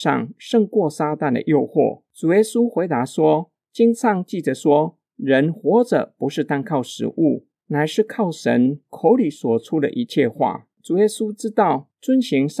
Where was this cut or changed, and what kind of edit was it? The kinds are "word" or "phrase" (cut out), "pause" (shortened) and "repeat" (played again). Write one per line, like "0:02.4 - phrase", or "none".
0:02.1 - pause
0:07.6 - pause
0:10.7 - pause